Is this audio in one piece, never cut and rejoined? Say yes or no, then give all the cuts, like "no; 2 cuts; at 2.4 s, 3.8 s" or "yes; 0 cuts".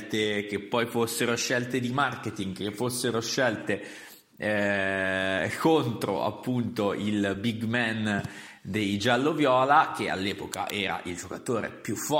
yes; 0 cuts